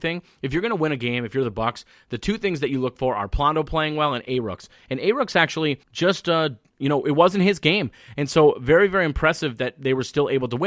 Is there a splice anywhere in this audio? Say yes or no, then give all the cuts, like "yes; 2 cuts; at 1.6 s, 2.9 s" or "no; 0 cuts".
yes; 1 cut; at 5.8 s